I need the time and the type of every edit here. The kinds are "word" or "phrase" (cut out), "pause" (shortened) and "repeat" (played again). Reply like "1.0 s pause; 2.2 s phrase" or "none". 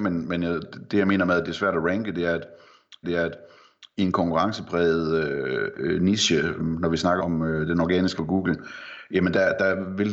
3.0 s repeat; 6.6 s word; 7.2 s word; 8.2 s word